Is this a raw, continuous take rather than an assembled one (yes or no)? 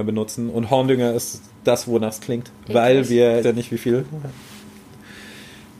no